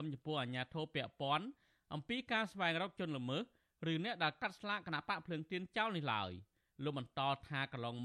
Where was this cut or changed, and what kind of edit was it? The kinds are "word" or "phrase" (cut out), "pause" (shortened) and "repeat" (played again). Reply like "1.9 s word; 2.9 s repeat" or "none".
none